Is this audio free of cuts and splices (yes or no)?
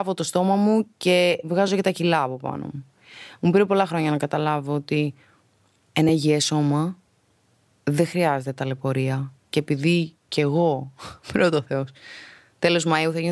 yes